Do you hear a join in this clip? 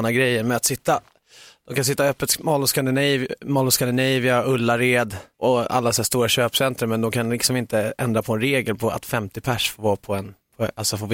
no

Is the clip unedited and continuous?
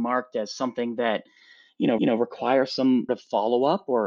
no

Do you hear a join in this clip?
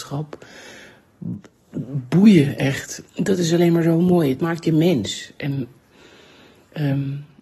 no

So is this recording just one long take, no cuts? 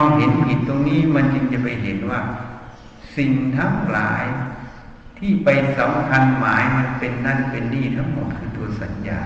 yes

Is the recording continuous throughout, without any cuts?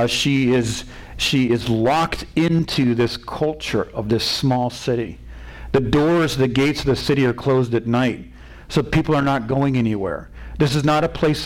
yes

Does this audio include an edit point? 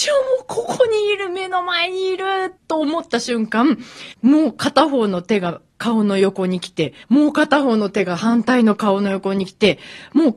yes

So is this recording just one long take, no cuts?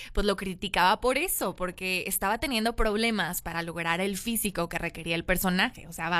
yes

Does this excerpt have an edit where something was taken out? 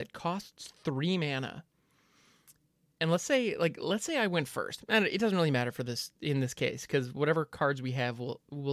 no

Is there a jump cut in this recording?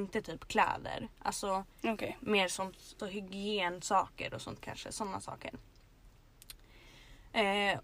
yes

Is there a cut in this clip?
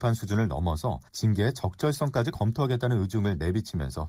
yes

